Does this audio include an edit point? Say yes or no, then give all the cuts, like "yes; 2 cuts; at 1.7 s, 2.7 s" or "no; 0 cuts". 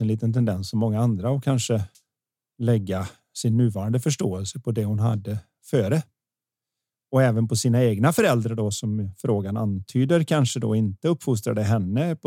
no; 0 cuts